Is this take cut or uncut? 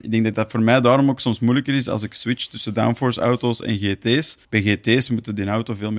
cut